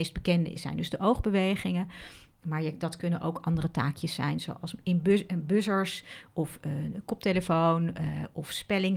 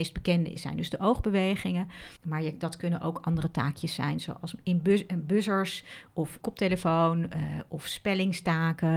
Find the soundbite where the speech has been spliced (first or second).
second